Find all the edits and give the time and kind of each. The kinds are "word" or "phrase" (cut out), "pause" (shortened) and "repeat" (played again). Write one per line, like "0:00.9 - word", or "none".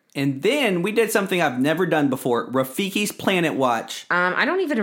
none

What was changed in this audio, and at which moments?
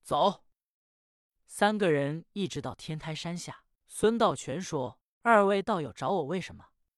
0:03.8 - pause

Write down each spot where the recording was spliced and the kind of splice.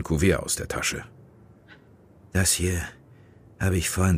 none

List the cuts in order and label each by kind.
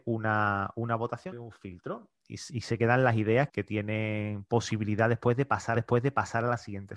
0:01.3 - word
0:03.5 - word
0:05.8 - repeat

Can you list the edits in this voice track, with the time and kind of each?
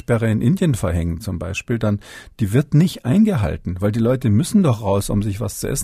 none

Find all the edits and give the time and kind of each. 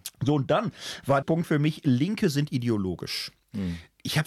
0:01.2 - phrase

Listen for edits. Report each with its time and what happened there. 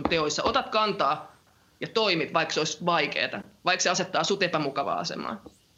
none

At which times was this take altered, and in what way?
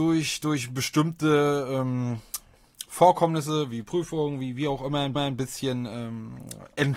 0:05.2 - repeat

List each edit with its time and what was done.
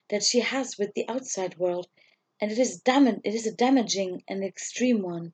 none

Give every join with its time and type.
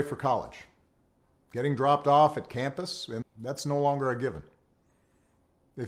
0:03.2 - phrase

